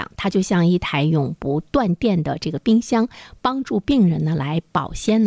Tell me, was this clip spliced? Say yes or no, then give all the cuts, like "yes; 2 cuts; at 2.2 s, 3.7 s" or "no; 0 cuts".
no; 0 cuts